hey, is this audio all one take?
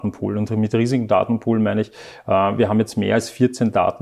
yes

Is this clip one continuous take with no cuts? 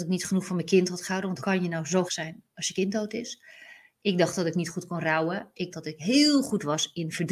no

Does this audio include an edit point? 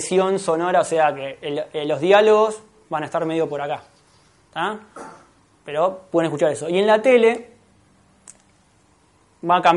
no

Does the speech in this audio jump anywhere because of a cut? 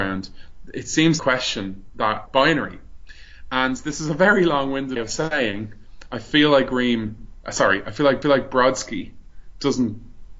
yes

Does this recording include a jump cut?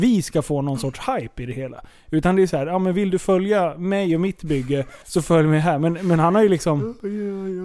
yes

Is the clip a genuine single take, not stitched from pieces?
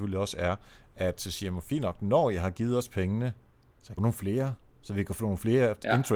no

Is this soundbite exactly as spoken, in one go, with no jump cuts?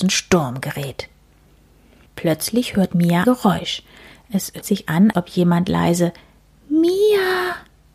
no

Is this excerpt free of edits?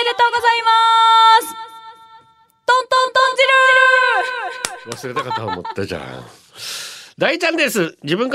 yes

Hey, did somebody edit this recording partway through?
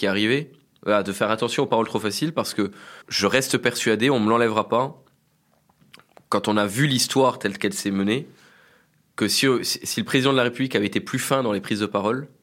yes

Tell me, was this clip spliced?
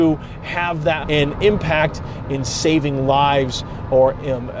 yes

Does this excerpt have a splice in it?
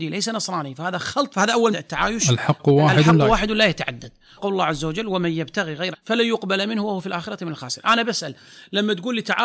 yes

